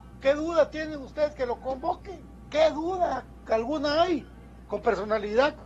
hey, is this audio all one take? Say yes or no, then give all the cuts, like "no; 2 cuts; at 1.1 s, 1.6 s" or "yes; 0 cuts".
yes; 0 cuts